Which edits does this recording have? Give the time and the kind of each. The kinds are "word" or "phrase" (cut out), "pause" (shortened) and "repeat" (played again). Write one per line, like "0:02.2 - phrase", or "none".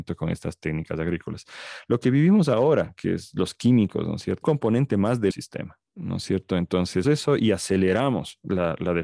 0:04.4 - phrase
0:05.3 - word
0:05.9 - pause
0:07.0 - word